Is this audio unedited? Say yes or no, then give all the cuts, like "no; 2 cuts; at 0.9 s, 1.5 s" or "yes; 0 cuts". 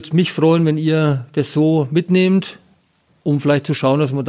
yes; 0 cuts